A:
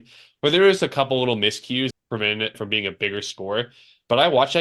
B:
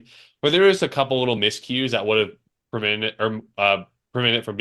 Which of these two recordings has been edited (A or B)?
A